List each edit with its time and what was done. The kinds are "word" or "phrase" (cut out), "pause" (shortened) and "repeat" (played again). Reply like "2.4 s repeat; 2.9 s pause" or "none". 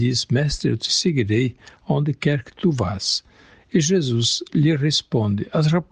none

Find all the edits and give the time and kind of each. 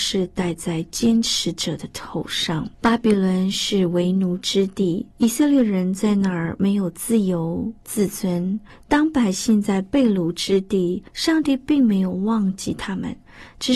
2.7 s pause; 5.1 s pause; 7.8 s pause; 8.7 s pause; 11.1 s pause

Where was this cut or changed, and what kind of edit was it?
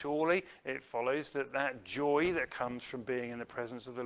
none

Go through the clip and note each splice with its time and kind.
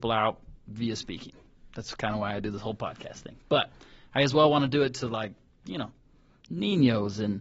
none

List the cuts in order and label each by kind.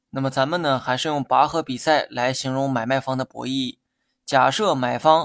none

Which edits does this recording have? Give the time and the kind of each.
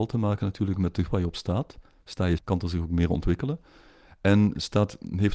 1.1 s word; 2.4 s word

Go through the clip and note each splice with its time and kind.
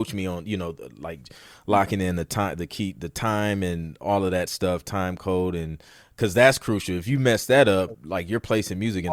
none

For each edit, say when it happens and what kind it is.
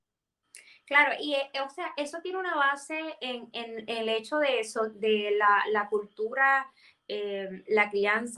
none

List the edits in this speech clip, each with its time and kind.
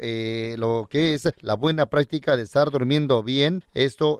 none

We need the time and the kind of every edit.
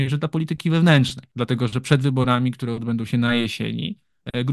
none

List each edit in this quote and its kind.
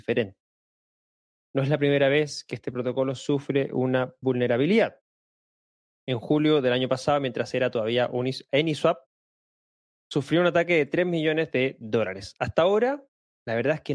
none

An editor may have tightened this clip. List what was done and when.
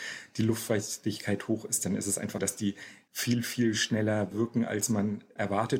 2.4 s word; 4.3 s word

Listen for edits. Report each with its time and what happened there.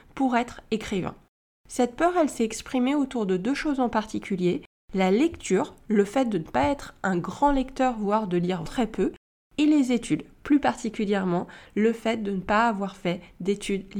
8.7 s word

